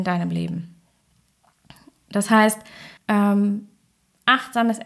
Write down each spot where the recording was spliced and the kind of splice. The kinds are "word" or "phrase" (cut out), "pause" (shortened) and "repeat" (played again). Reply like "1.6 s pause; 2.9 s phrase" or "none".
3.0 s pause